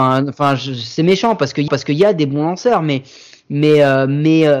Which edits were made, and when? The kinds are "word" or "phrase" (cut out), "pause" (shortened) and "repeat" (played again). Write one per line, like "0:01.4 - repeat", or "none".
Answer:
0:01.7 - repeat